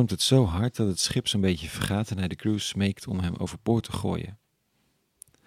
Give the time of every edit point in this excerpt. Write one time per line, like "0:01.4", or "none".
none